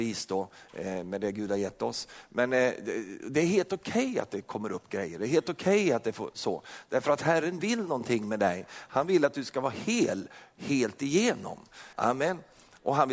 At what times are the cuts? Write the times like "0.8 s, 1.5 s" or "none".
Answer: 11.9 s